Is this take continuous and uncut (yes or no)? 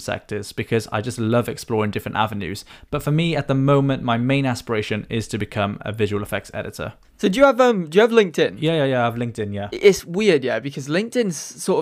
yes